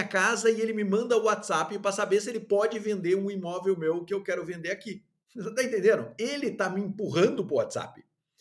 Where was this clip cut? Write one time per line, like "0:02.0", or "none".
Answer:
0:05.2